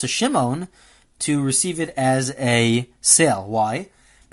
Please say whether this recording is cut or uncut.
uncut